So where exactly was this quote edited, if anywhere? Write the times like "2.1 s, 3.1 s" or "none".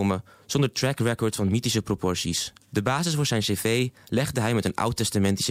2.6 s